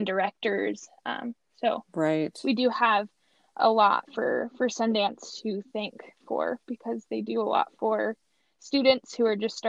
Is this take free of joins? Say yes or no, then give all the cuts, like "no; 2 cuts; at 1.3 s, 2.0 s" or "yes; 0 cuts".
yes; 0 cuts